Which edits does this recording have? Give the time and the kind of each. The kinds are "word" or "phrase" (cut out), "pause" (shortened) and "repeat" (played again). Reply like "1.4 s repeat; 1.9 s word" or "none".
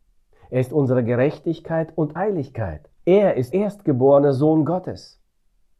2.2 s word; 3.0 s pause; 3.5 s word